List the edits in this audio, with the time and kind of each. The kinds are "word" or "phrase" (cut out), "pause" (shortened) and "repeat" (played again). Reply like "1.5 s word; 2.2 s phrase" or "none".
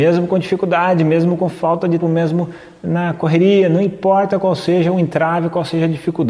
2.0 s word